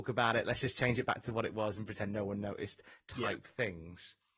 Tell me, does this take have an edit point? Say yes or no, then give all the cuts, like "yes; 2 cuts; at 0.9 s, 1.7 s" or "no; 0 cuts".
no; 0 cuts